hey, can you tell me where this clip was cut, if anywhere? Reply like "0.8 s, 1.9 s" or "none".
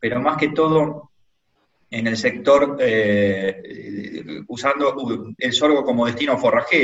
5.4 s